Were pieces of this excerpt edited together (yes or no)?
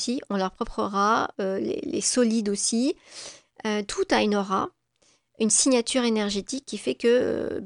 no